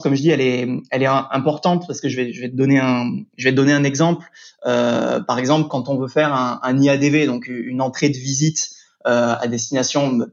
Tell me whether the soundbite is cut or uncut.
uncut